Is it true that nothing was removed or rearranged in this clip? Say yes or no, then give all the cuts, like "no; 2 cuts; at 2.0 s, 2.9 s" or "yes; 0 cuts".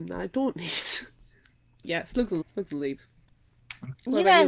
no; 2 cuts; at 1.8 s, 2.4 s